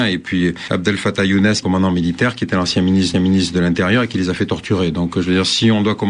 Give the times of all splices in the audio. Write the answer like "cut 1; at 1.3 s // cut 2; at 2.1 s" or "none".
cut 1; at 1.6 s // cut 2; at 3.1 s